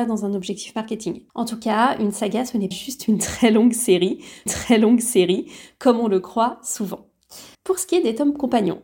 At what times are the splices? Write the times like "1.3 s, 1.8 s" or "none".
1.3 s, 2.7 s, 4.5 s, 7.5 s

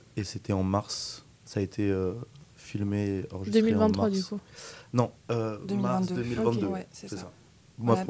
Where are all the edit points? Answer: 1.3 s

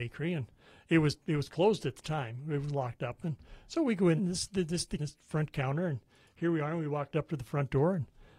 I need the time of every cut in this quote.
4.2 s, 5.0 s

